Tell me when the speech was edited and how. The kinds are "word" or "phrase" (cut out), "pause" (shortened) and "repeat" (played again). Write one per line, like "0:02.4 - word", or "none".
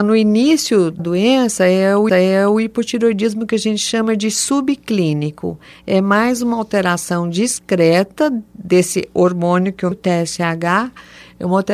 0:01.0 - word
0:02.1 - repeat
0:09.9 - word